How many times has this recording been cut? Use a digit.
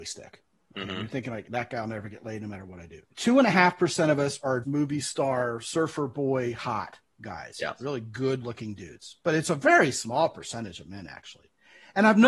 3